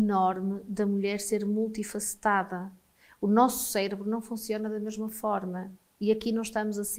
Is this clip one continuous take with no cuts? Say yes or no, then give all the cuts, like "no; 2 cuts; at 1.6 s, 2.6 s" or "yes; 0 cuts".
yes; 0 cuts